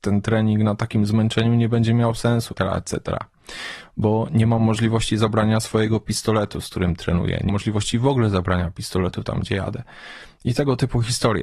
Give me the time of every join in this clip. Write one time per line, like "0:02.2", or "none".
0:02.5
0:07.5